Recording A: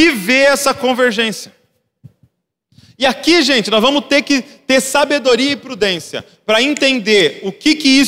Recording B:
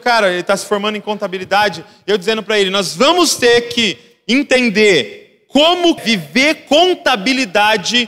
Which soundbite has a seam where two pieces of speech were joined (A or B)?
B